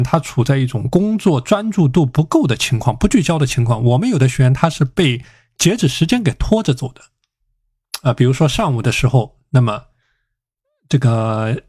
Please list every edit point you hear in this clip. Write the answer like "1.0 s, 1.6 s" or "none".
none